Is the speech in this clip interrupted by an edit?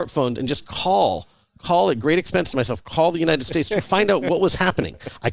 no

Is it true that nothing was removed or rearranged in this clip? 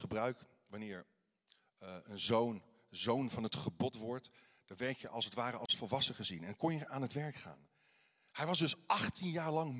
yes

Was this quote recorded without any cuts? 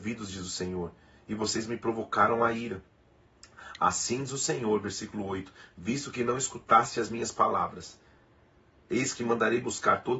yes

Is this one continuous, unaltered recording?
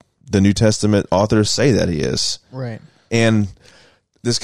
yes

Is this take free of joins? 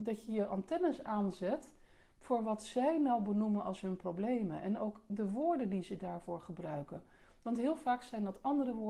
yes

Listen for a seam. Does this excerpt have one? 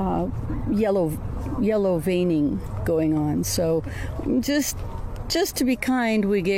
no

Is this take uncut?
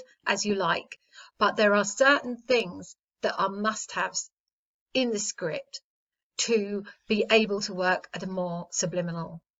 yes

